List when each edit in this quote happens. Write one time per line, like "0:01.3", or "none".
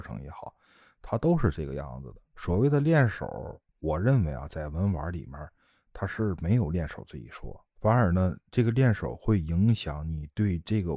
0:02.2
0:03.7
0:07.7

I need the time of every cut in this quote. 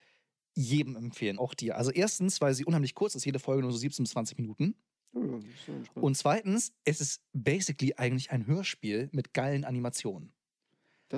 0:01.4

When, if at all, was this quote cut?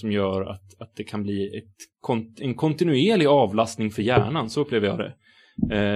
none

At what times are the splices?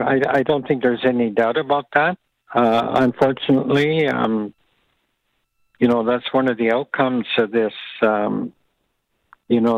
0:02.3

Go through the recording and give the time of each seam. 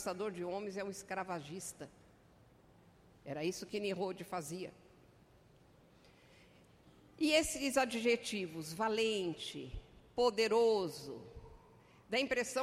none

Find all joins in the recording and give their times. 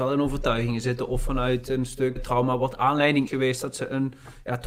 0:02.2
0:03.3

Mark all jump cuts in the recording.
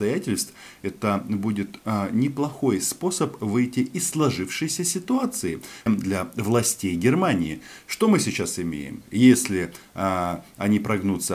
0:05.9

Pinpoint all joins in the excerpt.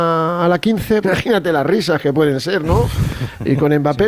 0:01.0

